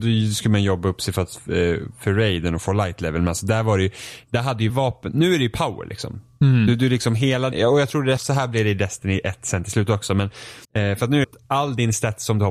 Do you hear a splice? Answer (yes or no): yes